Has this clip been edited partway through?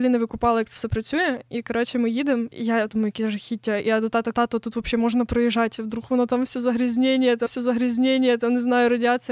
yes; 3 cuts; at 2.9 s, 4.3 s, 7.5 s

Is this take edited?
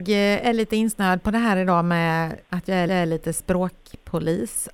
yes; 2 cuts; at 2.4 s, 2.9 s

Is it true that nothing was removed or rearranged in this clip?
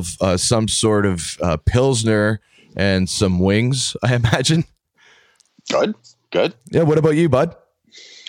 yes; 0 cuts

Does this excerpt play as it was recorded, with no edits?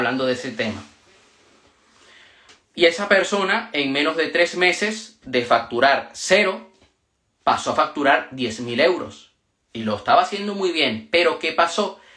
yes; 0 cuts

